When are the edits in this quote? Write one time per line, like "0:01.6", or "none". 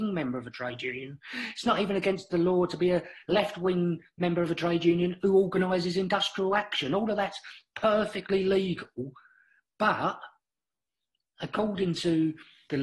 none